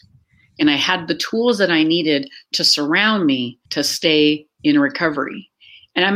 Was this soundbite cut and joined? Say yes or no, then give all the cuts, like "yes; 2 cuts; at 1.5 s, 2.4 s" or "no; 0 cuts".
yes; 1 cut; at 3.7 s